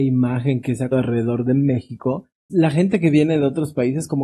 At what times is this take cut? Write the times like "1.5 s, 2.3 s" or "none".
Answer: 0.9 s, 2.5 s